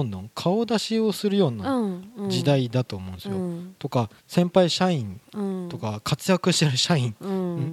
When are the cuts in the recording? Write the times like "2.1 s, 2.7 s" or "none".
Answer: 4.2 s